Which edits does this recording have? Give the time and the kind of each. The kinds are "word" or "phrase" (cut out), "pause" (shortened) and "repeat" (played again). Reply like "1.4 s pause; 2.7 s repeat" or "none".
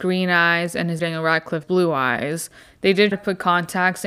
1.0 s word; 1.6 s word; 3.1 s word